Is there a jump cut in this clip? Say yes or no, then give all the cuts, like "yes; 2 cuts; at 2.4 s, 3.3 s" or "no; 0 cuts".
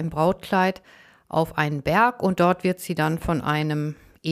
no; 0 cuts